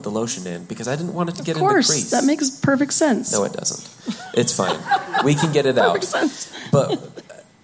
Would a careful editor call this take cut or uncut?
uncut